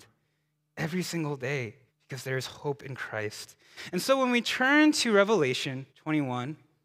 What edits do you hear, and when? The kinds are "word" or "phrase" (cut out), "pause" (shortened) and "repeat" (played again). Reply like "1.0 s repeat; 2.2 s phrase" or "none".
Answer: 1.9 s pause; 5.9 s pause